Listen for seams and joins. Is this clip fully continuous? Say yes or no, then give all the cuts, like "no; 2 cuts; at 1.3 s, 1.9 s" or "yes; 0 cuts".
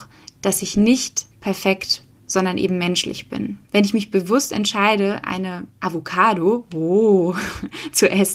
no; 2 cuts; at 1.3 s, 3.6 s